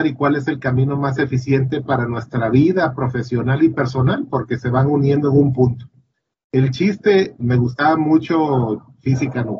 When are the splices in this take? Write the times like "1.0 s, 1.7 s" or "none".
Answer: 7.4 s

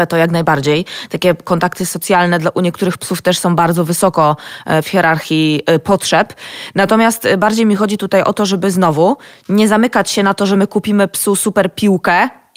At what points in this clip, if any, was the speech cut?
none

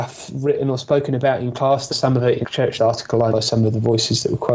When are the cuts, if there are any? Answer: 1.9 s, 2.4 s, 2.8 s, 3.3 s

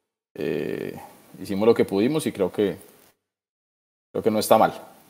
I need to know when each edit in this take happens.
none

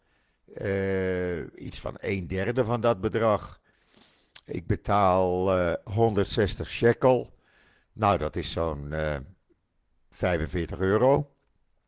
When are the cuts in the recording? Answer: none

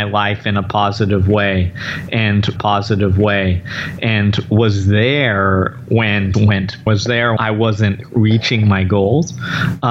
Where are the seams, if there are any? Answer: 2.6 s, 6.3 s, 6.9 s, 7.4 s

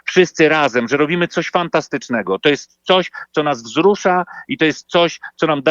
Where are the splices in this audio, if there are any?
none

